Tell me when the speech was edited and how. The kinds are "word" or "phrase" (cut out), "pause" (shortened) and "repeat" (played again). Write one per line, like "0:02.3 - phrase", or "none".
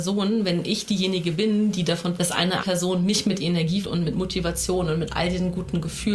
0:02.2 - word
0:02.6 - word
0:03.8 - word